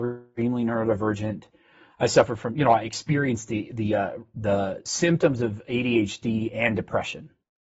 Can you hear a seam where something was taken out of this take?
no; 0 cuts

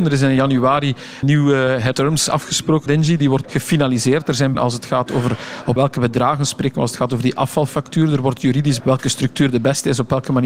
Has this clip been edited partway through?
yes; 7 cuts; at 1.2 s, 1.9 s, 2.9 s, 3.4 s, 4.5 s, 5.8 s, 8.8 s

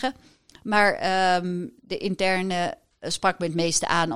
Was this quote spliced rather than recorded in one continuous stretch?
no; 0 cuts

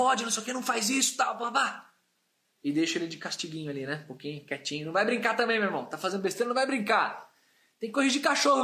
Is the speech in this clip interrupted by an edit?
no; 0 cuts

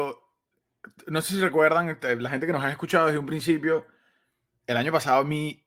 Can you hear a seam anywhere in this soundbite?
no; 0 cuts

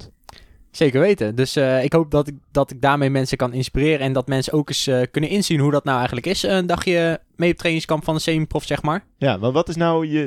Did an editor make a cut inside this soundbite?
no; 0 cuts

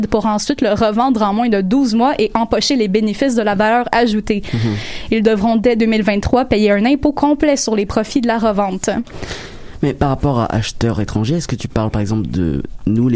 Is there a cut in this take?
no; 0 cuts

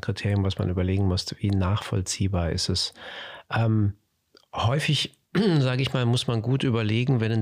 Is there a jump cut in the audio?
no; 0 cuts

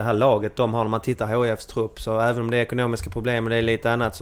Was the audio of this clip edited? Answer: no; 0 cuts

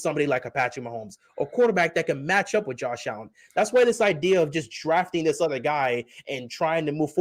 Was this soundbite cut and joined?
no; 0 cuts

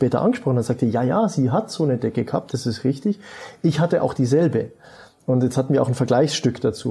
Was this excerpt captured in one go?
yes; 0 cuts

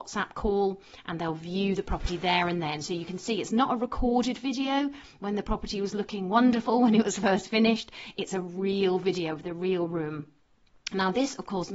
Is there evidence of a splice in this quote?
no; 0 cuts

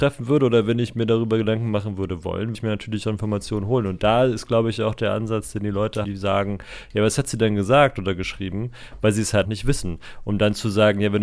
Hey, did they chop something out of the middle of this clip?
yes; 3 cuts; at 2.5 s, 6.0 s, 9.4 s

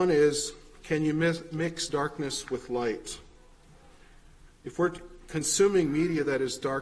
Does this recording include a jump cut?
no; 0 cuts

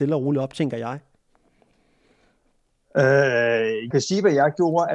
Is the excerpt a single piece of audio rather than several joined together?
no; 1 cut; at 3.9 s

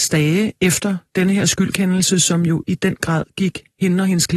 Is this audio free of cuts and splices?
yes; 0 cuts

